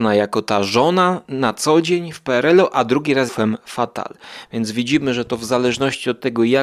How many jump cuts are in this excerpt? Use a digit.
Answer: 1